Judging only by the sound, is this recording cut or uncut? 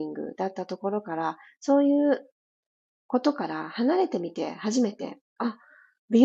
uncut